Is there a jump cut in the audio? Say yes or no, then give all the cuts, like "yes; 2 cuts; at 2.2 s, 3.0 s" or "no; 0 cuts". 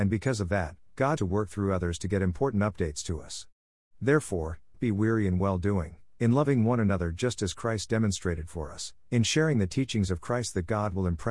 yes; 2 cuts; at 1.2 s, 4.7 s